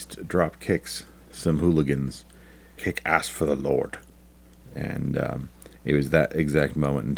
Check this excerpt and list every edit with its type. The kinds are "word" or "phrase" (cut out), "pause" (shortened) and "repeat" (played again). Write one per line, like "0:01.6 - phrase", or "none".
0:02.8 - phrase
0:05.7 - pause